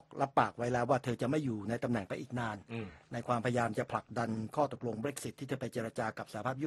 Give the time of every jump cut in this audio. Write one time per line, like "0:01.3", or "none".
none